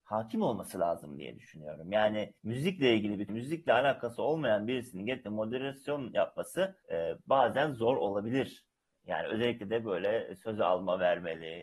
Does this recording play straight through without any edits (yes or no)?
no